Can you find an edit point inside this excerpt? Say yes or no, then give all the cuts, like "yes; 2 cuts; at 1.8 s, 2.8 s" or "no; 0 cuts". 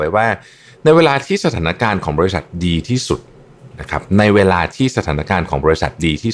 yes; 1 cut; at 3.7 s